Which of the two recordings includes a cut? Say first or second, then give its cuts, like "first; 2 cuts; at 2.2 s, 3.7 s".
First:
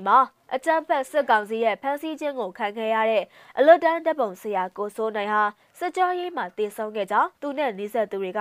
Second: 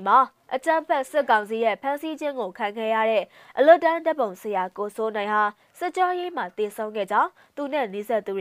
first; 1 cut; at 7.3 s